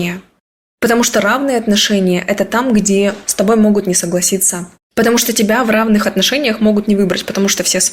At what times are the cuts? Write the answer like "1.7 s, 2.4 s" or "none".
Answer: 4.7 s